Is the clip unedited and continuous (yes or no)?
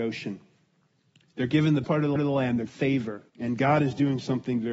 no